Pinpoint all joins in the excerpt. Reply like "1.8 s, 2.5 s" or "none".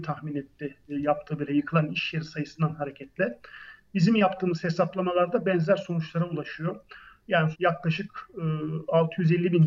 1.5 s, 7.5 s